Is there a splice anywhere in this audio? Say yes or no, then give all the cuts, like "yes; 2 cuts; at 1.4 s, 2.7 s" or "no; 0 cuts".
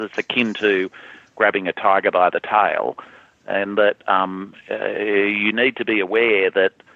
no; 0 cuts